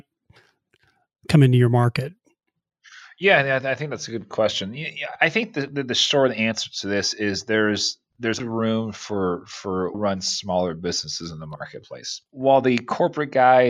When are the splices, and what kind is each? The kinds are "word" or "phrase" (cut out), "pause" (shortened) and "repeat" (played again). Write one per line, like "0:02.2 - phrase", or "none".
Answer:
0:08.4 - word
0:09.9 - word
0:12.3 - pause